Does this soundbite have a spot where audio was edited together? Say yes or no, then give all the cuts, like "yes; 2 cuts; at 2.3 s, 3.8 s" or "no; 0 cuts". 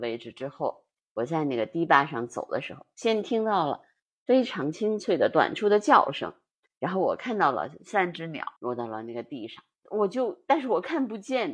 yes; 1 cut; at 8.6 s